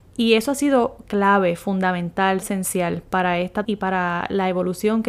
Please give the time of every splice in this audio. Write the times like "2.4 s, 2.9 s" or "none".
2.4 s, 3.6 s